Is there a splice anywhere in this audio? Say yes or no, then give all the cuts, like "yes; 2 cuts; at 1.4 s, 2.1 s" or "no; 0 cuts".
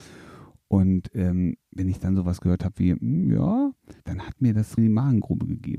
yes; 3 cuts; at 1.6 s, 4.0 s, 4.8 s